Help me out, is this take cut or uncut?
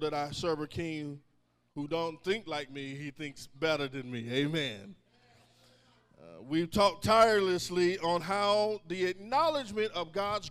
uncut